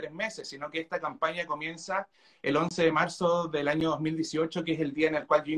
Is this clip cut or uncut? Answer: uncut